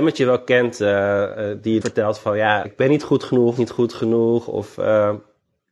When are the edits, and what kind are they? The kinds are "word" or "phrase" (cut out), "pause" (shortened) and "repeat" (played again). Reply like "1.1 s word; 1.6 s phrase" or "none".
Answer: 1.8 s word; 2.6 s word; 3.6 s phrase